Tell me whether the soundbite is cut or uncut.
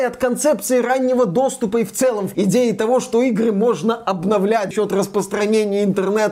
cut